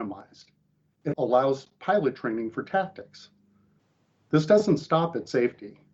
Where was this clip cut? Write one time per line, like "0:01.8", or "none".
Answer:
0:01.1